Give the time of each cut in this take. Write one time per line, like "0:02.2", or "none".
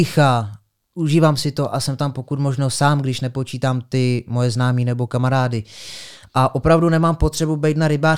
none